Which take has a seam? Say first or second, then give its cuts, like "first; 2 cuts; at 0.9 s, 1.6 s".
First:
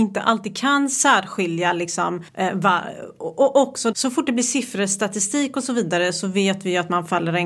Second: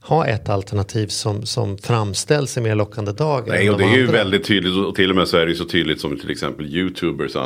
first; 2 cuts; at 2.3 s, 3.9 s